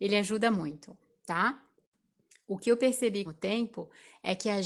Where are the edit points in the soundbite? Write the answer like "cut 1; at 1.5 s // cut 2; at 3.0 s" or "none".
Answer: cut 1; at 3.3 s